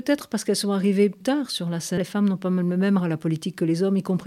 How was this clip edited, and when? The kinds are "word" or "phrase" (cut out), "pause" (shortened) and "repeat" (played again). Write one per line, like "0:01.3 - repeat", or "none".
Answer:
0:01.2 - word
0:02.0 - word
0:03.0 - word